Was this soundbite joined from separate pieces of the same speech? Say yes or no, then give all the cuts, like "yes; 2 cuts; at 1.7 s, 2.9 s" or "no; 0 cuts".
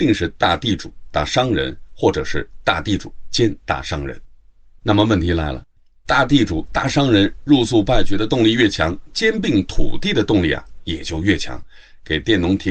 no; 0 cuts